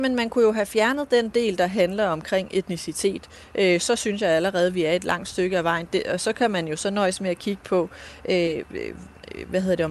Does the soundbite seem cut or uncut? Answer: uncut